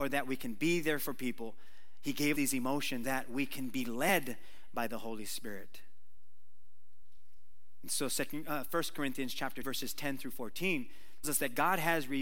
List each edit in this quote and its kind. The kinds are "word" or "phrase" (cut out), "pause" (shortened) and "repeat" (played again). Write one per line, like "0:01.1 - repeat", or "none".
0:02.3 - word
0:03.0 - word
0:09.6 - word
0:11.2 - word